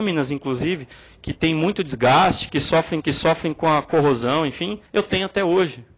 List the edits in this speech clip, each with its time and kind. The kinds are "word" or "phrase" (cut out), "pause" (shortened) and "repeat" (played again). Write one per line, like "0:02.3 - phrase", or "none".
0:03.0 - repeat
0:04.9 - pause